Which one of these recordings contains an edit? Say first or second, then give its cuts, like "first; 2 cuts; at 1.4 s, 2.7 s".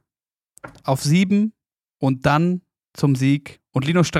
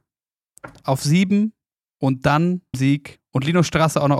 second; 1 cut; at 2.7 s